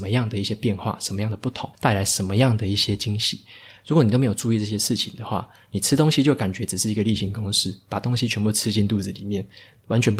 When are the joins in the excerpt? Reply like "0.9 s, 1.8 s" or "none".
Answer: 1.7 s